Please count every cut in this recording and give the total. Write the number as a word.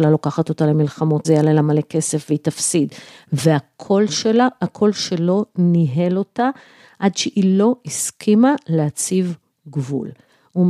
one